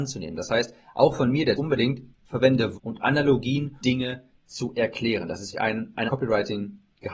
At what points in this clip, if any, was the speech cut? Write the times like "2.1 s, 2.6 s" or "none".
1.5 s, 2.7 s, 3.8 s, 5.5 s, 6.1 s